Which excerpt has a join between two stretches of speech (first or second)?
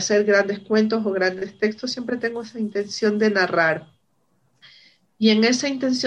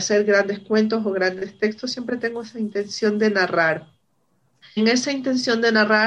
second